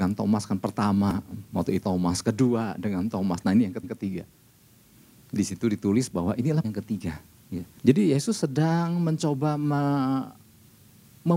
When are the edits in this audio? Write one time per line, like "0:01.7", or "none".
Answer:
0:01.8
0:03.8
0:05.4
0:06.6
0:07.8